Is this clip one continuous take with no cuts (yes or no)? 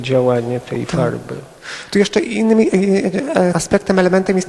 no